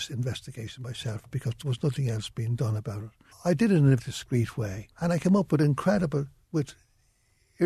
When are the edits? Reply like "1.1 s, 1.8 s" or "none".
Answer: 3.3 s, 4.0 s, 4.9 s